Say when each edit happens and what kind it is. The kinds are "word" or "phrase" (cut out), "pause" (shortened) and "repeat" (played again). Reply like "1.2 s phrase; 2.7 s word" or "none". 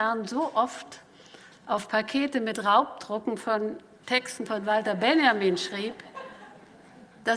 none